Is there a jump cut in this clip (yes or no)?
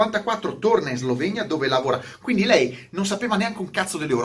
no